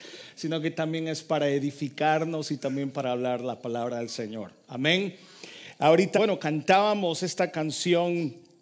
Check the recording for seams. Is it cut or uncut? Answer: cut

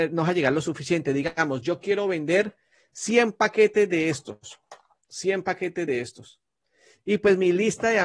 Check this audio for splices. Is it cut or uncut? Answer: uncut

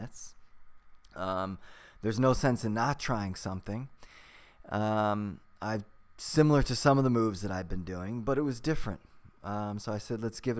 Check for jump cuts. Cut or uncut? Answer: uncut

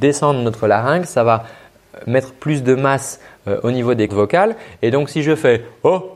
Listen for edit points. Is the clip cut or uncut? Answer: cut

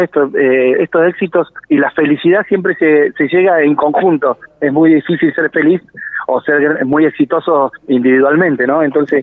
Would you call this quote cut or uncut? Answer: cut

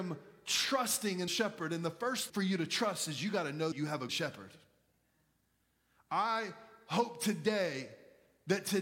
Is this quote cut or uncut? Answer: cut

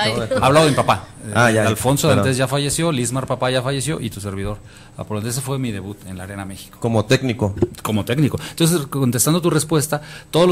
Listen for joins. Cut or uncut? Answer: uncut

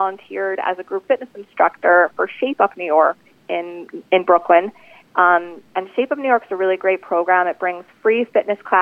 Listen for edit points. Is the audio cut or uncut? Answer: uncut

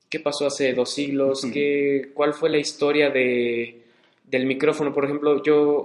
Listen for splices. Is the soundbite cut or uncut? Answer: uncut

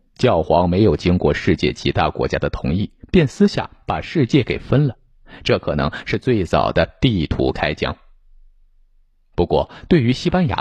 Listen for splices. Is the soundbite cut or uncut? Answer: uncut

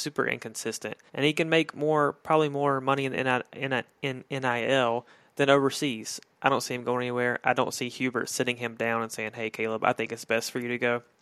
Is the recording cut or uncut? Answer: cut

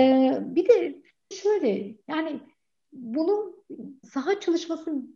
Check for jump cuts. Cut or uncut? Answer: cut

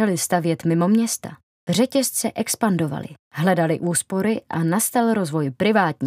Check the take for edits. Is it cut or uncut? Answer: uncut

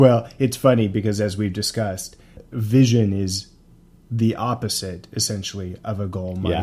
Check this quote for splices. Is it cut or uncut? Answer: uncut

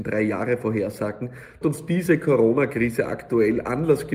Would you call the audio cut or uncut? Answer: cut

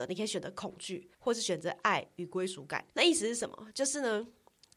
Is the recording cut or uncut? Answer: cut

